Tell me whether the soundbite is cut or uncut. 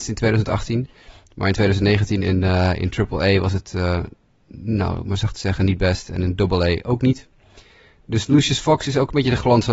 uncut